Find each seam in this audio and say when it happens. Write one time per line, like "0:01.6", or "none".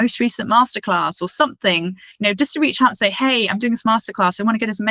none